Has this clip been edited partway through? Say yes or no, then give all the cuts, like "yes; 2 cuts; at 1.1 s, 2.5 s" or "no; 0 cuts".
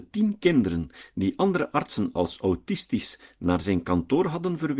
no; 0 cuts